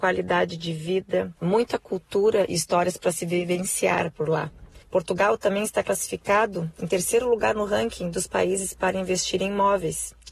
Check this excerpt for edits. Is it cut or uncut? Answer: cut